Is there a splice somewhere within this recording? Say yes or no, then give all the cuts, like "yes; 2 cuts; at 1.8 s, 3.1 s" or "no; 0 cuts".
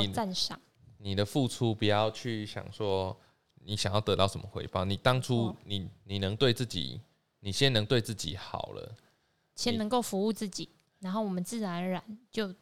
yes; 1 cut; at 10.8 s